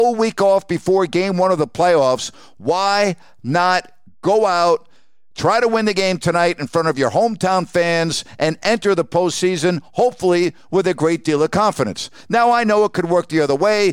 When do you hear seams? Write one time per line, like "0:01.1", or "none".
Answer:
none